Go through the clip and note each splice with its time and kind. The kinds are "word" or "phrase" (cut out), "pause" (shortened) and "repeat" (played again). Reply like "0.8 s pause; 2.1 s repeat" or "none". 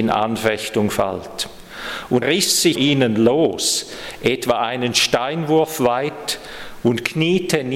2.2 s word; 2.7 s word